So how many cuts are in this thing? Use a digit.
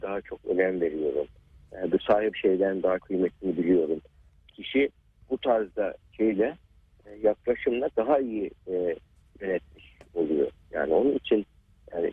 5